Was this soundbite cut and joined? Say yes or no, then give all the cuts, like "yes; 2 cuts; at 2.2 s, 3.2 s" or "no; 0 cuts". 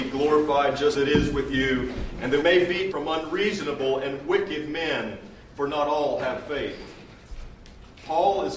yes; 3 cuts; at 0.9 s, 2.4 s, 2.9 s